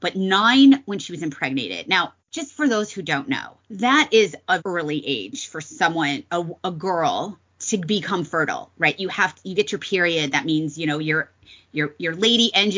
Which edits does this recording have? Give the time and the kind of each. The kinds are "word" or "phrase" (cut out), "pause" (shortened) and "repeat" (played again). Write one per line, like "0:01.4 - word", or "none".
0:02.2 - pause
0:03.6 - pause
0:04.6 - word
0:06.6 - word